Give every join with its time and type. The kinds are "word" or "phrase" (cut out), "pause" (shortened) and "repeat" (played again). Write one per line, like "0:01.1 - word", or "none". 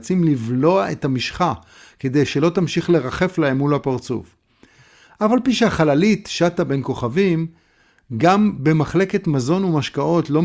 none